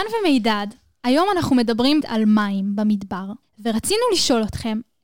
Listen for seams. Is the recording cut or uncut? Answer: cut